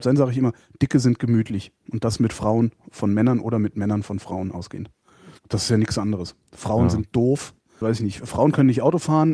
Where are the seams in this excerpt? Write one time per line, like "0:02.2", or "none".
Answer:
0:05.4
0:07.8